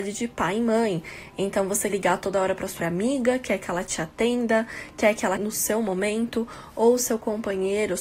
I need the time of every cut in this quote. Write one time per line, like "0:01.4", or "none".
0:01.9
0:02.8
0:05.4